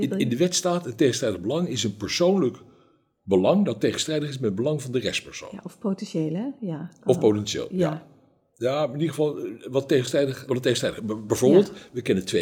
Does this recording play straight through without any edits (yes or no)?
no